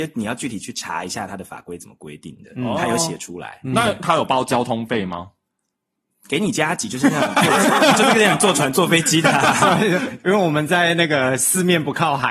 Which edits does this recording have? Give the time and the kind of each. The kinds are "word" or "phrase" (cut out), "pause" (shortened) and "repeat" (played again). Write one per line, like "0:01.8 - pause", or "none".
none